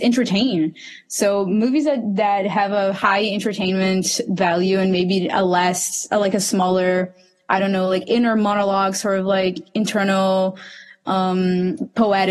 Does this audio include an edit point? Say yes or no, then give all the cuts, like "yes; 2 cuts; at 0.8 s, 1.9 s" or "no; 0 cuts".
no; 0 cuts